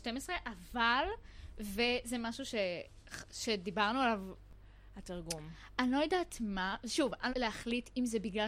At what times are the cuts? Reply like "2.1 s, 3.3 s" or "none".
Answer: 7.3 s

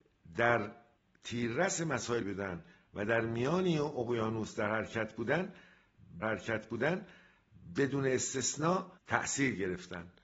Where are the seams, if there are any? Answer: 1.0 s, 2.2 s, 6.2 s, 9.0 s

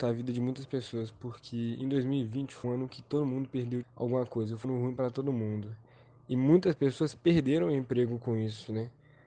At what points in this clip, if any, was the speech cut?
2.6 s, 3.8 s, 4.6 s

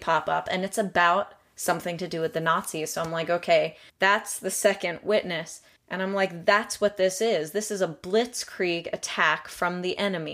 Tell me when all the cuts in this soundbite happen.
3.9 s, 5.8 s

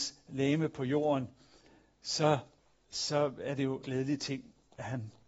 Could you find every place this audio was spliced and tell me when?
2.6 s, 3.8 s

